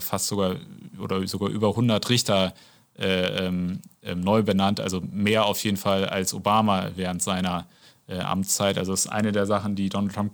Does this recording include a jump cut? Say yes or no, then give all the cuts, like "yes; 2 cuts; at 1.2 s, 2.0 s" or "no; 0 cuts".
no; 0 cuts